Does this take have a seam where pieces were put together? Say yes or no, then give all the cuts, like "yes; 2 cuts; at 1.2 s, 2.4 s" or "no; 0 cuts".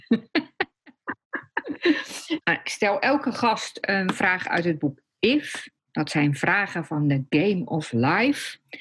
no; 0 cuts